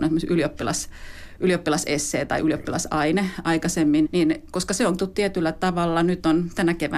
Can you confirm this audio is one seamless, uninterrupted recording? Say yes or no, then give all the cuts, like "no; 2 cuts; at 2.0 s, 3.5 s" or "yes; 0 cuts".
no; 2 cuts; at 4.0 s, 5.0 s